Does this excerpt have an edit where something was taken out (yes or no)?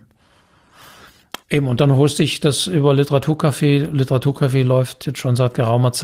yes